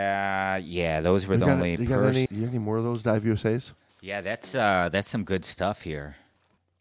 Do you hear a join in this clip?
yes; 1 cut; at 2.3 s

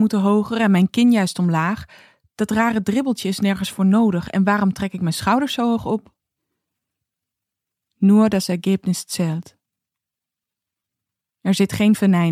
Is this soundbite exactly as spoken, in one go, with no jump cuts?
yes; 0 cuts

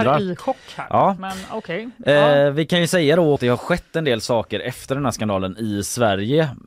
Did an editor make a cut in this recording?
yes; 1 cut; at 3.4 s

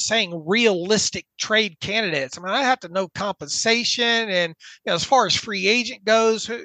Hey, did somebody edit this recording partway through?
no; 0 cuts

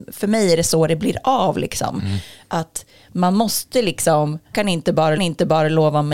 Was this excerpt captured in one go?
no; 2 cuts; at 4.5 s, 5.2 s

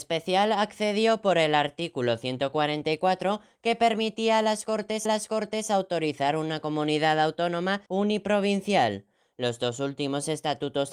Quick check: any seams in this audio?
yes; 2 cuts; at 5.0 s, 7.9 s

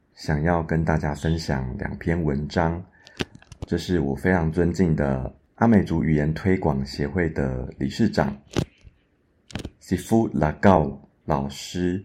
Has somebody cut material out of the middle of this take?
no; 0 cuts

